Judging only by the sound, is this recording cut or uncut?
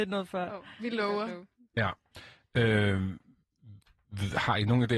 uncut